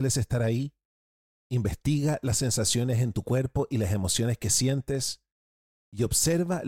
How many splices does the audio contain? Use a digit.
0